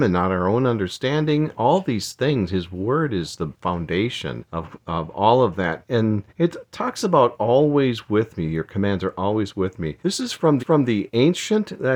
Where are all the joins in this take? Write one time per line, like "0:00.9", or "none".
0:04.5
0:06.3
0:10.0
0:10.6